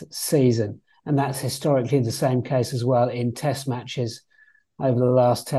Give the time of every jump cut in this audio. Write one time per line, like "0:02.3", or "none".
none